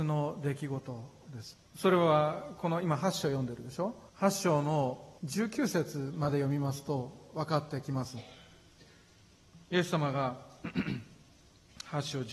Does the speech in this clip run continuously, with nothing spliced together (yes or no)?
no